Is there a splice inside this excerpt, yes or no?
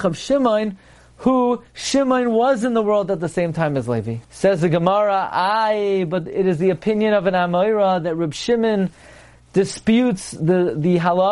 yes